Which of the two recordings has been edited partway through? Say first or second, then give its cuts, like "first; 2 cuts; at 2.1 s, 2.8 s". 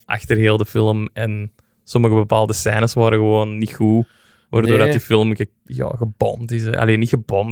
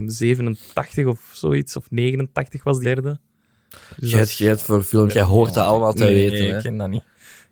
second; 2 cuts; at 2.8 s, 5.1 s